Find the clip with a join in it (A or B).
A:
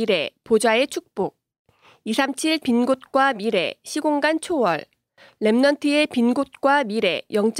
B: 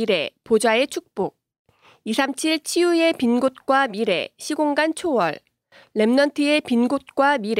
A